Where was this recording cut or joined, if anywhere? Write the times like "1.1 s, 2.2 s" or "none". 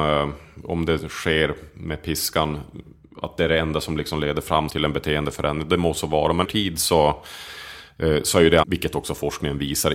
4.7 s, 6.4 s, 8.6 s